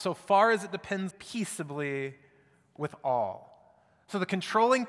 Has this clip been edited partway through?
yes; 1 cut; at 1.1 s

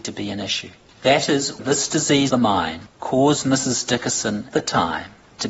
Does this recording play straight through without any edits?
no; 3 cuts; at 1.6 s, 2.3 s, 4.5 s

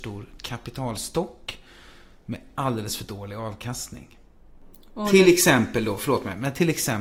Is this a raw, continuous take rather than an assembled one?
yes; 0 cuts

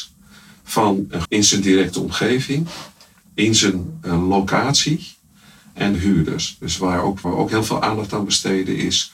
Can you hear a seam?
yes; 3 cuts; at 1.2 s, 5.9 s, 7.2 s

